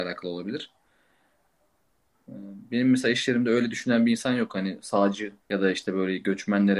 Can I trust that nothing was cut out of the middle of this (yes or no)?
no